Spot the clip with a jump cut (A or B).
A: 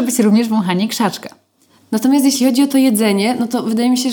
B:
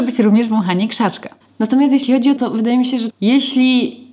B